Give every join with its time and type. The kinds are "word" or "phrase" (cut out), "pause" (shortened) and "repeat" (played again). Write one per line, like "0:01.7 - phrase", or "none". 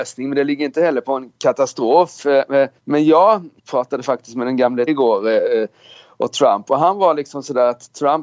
0:02.8 - pause
0:03.6 - pause
0:04.9 - phrase